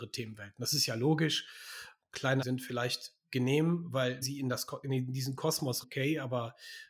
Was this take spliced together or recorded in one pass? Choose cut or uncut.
cut